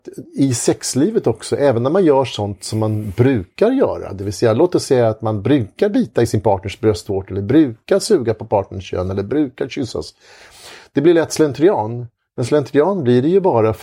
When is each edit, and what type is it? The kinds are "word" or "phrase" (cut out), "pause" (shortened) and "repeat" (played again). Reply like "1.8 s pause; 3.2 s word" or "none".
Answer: none